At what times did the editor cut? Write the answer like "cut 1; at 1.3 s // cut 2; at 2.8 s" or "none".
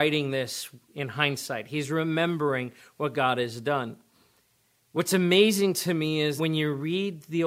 cut 1; at 6.4 s